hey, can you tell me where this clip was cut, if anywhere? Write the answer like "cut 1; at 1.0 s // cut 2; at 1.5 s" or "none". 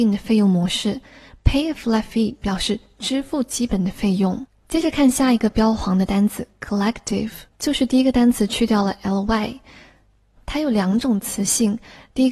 cut 1; at 7.5 s